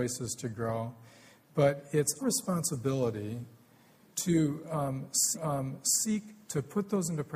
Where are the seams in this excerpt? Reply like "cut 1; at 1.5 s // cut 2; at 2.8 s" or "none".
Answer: cut 1; at 2.2 s // cut 2; at 5.3 s